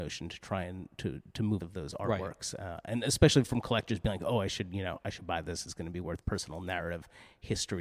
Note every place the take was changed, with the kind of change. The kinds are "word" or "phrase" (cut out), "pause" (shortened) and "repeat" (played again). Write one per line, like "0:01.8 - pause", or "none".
0:01.6 - phrase
0:06.2 - phrase

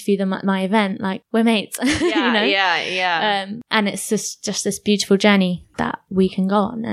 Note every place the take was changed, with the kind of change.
none

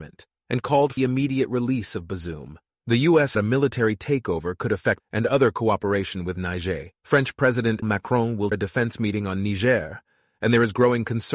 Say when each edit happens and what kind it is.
0:01.0 - word
0:02.7 - pause
0:03.3 - phrase
0:05.0 - word
0:07.0 - pause
0:07.8 - word
0:08.5 - word

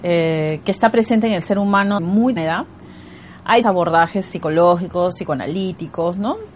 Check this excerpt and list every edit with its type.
0:02.0 - word
0:02.4 - word
0:03.6 - word

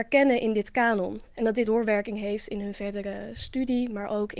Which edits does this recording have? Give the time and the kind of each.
0:01.7 - word

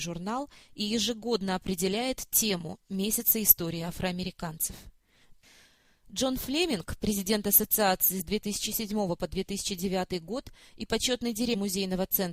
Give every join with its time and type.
none

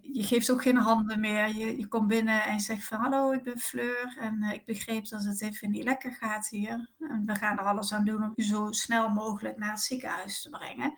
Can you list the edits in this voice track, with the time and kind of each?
none

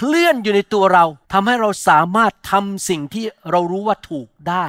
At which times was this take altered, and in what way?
0:01.2 - pause

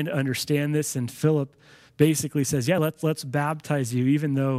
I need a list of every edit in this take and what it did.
none

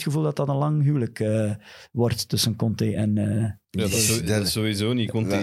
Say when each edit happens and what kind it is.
0:03.6 - pause

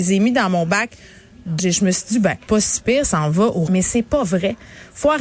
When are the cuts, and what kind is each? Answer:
0:01.6 - word
0:02.5 - word
0:03.0 - word
0:03.7 - word

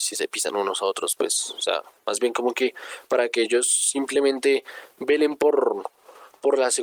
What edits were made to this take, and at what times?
none

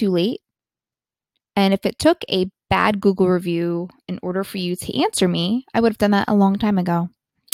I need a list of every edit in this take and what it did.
none

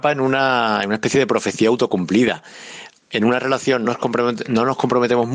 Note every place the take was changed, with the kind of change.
0:03.8 - word

